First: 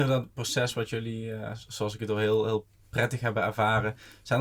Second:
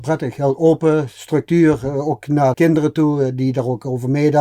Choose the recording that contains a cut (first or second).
second